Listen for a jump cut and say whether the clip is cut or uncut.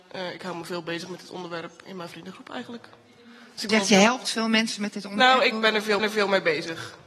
cut